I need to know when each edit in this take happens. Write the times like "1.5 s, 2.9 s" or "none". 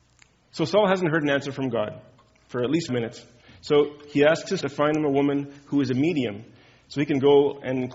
2.9 s, 4.6 s